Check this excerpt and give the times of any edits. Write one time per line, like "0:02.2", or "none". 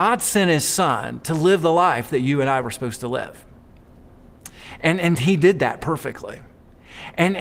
none